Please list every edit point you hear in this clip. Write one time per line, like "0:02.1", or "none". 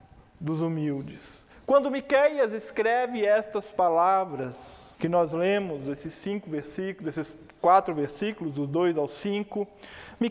0:04.9

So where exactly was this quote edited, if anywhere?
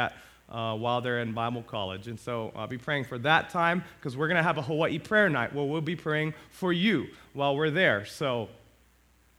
none

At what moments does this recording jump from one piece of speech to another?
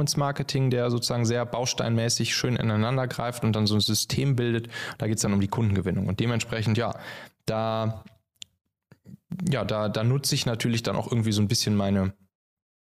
none

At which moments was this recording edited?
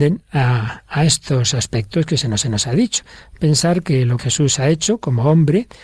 0:02.4
0:04.2

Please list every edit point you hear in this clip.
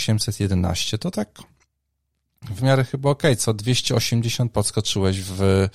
0:02.6
0:04.5

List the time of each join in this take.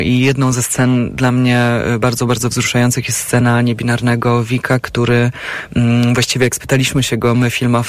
none

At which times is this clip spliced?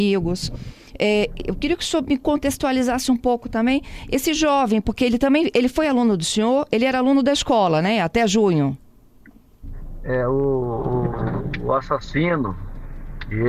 none

